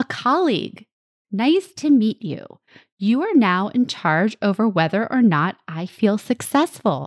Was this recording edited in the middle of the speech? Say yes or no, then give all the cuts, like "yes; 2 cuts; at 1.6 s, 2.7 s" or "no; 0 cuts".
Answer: no; 0 cuts